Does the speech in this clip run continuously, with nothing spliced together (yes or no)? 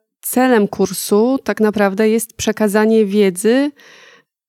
yes